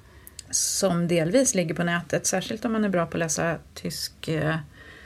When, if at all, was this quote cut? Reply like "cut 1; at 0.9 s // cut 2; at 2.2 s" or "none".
cut 1; at 3.7 s